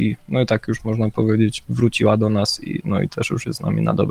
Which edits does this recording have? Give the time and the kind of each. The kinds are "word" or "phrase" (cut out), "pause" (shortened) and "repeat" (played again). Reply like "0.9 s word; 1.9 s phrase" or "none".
none